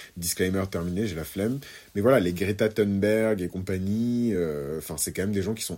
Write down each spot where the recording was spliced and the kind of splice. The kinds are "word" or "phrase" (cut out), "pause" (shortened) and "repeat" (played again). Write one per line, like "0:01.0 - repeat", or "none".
none